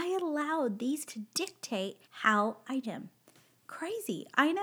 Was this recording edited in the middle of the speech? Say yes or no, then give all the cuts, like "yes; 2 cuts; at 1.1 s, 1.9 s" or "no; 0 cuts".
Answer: yes; 3 cuts; at 1.1 s, 2.0 s, 2.8 s